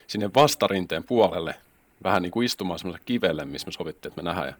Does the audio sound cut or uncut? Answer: uncut